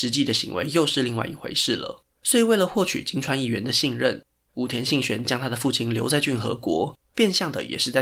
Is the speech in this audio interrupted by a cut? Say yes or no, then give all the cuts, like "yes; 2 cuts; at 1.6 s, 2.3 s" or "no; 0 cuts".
yes; 2 cuts; at 2.1 s, 7.0 s